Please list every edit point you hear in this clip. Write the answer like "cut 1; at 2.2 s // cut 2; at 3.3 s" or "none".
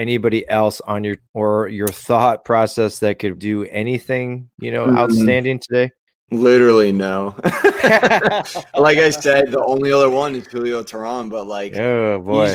cut 1; at 1.2 s // cut 2; at 3.4 s

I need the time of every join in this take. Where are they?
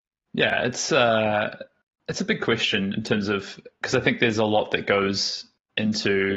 none

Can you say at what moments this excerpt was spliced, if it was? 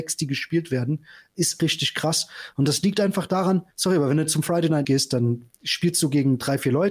cut 1; at 1.6 s // cut 2; at 3.7 s // cut 3; at 4.8 s // cut 4; at 5.5 s

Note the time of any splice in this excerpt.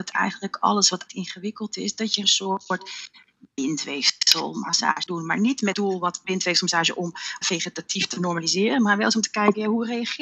cut 1; at 1.1 s // cut 2; at 2.2 s // cut 3; at 5.1 s // cut 4; at 5.7 s // cut 5; at 6.2 s // cut 6; at 7.4 s

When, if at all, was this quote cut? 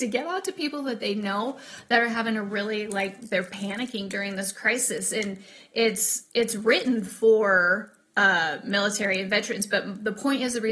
none

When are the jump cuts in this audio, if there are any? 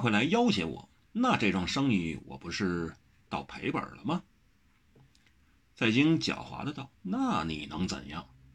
cut 1; at 1.0 s // cut 2; at 6.9 s

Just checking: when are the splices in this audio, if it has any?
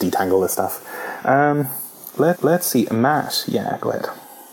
cut 1; at 2.3 s

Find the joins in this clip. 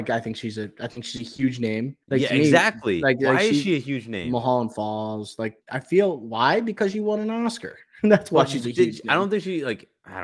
cut 1; at 2.0 s // cut 2; at 5.6 s

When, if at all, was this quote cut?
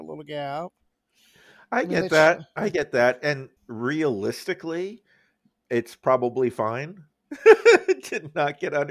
cut 1; at 3.6 s

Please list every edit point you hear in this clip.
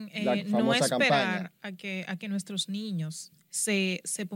none

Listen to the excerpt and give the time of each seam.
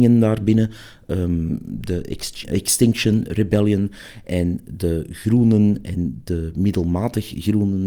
cut 1; at 2.4 s

